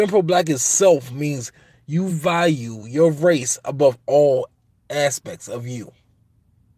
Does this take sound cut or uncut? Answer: uncut